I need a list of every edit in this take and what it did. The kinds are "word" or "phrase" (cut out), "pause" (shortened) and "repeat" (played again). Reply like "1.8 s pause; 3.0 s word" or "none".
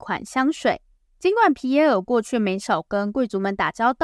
none